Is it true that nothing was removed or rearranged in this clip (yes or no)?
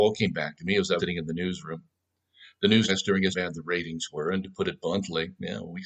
no